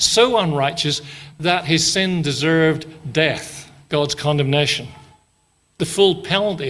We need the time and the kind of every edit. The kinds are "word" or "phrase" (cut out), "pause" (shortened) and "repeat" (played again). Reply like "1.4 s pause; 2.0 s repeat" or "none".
none